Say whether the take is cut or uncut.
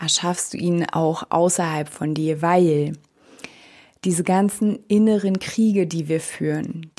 uncut